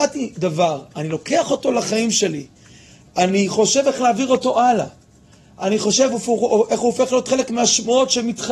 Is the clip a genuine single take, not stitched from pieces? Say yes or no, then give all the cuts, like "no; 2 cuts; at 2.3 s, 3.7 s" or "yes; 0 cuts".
yes; 0 cuts